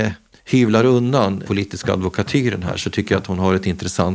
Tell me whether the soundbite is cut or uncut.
cut